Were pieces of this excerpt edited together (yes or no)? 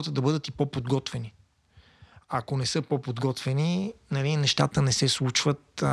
no